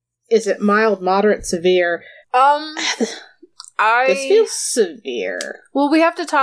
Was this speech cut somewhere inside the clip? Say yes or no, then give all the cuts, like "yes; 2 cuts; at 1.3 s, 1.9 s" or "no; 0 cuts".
yes; 1 cut; at 2.2 s